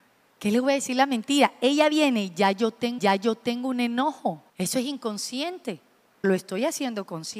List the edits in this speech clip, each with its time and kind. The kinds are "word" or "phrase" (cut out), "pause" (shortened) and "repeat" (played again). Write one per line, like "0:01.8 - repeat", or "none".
0:03.0 - repeat
0:04.5 - pause
0:06.2 - word